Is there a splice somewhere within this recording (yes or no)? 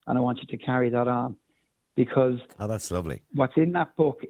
no